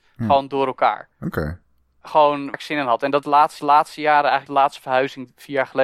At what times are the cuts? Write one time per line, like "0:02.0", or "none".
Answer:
0:01.1
0:02.5
0:03.2
0:03.6
0:04.5